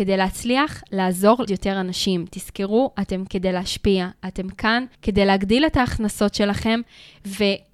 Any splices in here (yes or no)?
yes